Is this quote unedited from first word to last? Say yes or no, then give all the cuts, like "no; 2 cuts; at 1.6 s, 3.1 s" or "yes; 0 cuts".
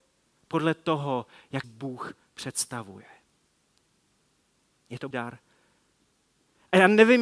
no; 2 cuts; at 1.6 s, 5.1 s